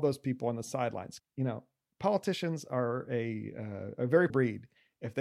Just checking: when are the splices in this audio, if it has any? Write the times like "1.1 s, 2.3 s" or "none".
1.2 s, 4.0 s, 4.3 s